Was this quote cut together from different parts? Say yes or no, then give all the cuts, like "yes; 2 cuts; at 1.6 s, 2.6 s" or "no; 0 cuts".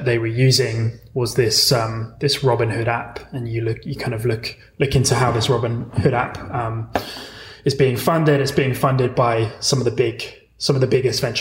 no; 0 cuts